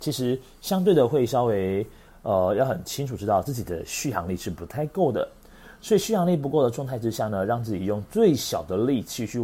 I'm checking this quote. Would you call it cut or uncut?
uncut